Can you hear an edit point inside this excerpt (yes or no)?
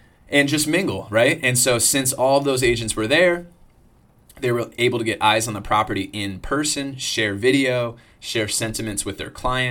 no